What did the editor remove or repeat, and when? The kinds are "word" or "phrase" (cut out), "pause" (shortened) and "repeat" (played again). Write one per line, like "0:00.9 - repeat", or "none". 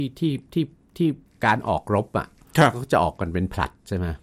0:01.3 - pause